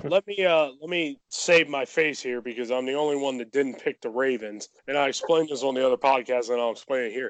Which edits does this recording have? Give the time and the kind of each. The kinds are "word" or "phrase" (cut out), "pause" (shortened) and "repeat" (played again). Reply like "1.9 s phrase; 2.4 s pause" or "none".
1.2 s pause; 4.8 s pause